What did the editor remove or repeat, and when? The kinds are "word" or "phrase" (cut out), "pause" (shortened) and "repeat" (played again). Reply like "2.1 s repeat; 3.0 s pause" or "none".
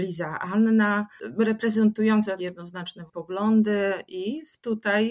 2.4 s word; 3.1 s word